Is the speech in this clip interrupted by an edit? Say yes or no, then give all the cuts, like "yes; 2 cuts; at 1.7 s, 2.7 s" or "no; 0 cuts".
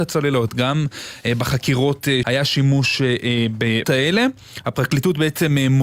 yes; 2 cuts; at 2.2 s, 3.8 s